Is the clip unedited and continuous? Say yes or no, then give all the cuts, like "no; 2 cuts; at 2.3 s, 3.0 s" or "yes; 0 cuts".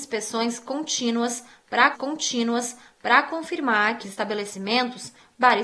no; 2 cuts; at 1.9 s, 4.0 s